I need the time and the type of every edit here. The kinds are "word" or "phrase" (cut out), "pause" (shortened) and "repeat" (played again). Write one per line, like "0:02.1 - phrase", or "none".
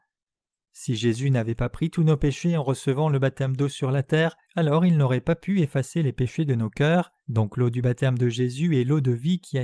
0:04.4 - pause
0:07.2 - pause